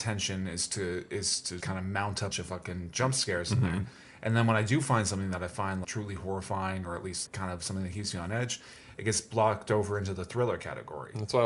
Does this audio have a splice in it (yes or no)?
yes